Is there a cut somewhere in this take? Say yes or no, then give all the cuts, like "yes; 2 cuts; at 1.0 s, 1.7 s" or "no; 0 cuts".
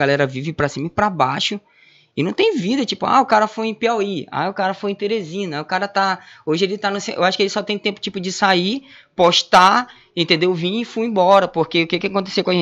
no; 0 cuts